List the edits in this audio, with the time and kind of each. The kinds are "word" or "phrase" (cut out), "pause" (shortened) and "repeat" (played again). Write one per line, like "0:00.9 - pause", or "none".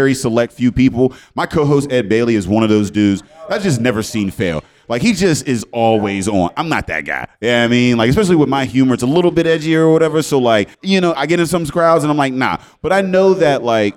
0:10.7 - pause